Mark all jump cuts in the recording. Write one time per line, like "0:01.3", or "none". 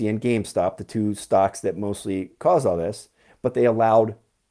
none